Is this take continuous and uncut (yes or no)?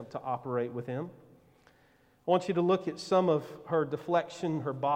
yes